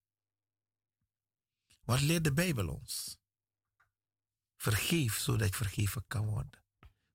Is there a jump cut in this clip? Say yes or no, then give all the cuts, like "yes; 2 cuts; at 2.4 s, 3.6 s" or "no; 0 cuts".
yes; 1 cut; at 5.5 s